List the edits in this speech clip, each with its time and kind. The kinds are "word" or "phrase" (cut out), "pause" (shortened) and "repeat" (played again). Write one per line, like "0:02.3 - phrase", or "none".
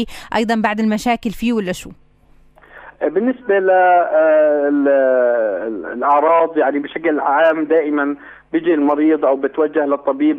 none